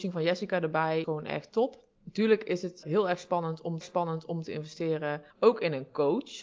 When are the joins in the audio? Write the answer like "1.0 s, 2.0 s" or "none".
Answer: 1.0 s, 1.9 s, 2.8 s, 3.8 s, 5.3 s